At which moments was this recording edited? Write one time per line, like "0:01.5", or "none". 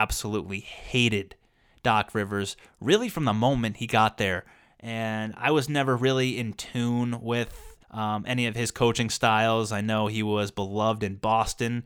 0:07.8

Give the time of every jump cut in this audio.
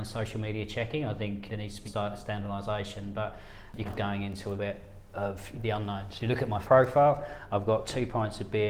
0:01.5
0:01.8
0:03.8
0:04.5
0:05.5
0:06.6

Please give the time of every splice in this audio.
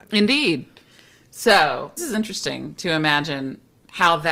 0:02.0

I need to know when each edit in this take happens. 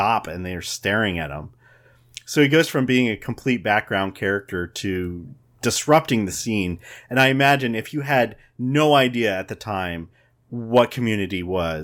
0:05.5

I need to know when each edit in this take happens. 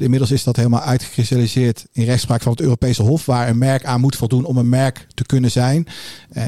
none

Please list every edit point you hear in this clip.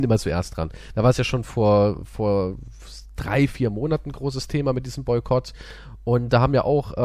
none

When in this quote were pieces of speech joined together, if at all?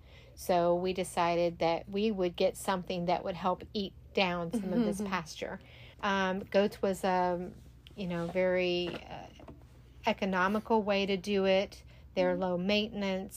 0:05.9

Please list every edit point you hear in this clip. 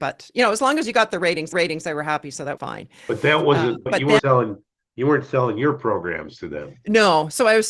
0:01.5
0:02.6
0:03.9
0:04.2

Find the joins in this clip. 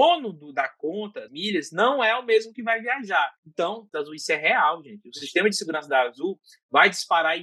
0:01.3
0:03.4
0:03.9

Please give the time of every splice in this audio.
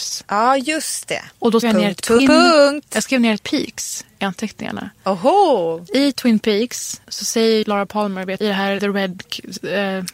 0:01.6
0:02.2
0:03.4
0:07.0
0:07.6
0:08.4
0:08.8

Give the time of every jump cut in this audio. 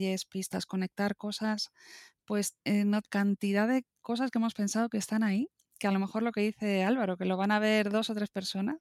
0:02.6
0:03.0

